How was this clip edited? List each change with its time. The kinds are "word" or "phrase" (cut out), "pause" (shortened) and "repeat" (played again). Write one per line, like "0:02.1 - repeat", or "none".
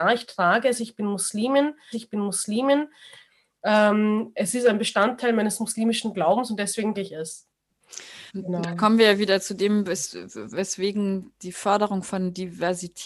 0:01.9 - repeat
0:06.9 - word
0:08.3 - pause